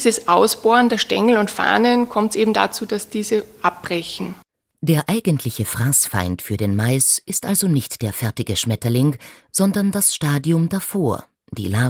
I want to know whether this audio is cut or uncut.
uncut